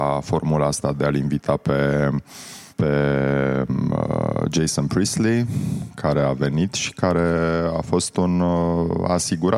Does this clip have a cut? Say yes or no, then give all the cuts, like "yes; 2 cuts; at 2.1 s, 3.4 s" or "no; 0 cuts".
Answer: yes; 1 cut; at 2.7 s